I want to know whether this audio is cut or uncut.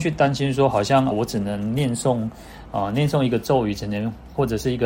cut